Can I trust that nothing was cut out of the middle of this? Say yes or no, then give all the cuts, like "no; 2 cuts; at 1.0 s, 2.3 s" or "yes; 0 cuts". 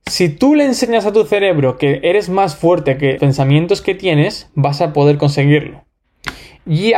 no; 1 cut; at 3.2 s